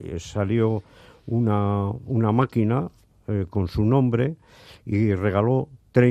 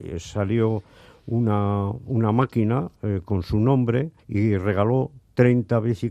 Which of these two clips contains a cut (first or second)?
second